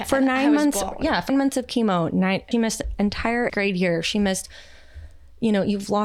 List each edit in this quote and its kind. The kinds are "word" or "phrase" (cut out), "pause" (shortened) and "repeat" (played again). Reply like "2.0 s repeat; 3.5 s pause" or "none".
1.3 s word; 2.5 s word; 3.5 s word